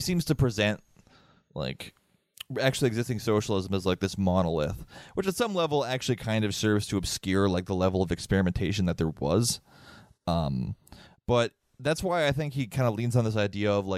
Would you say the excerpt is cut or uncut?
uncut